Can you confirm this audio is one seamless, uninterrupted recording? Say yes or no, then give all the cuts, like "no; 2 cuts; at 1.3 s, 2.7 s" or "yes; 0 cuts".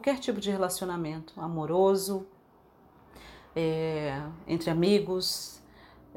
yes; 0 cuts